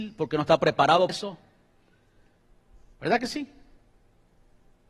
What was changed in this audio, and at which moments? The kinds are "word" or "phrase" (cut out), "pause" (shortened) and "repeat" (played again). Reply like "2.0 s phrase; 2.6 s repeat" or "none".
1.1 s word